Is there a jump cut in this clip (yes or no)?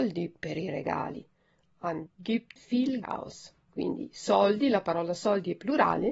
yes